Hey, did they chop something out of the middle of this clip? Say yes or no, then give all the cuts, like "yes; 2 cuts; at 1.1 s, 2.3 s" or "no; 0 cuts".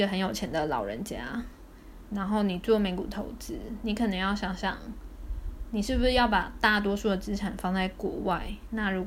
yes; 1 cut; at 5.6 s